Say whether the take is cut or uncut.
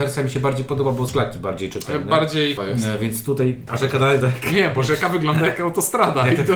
cut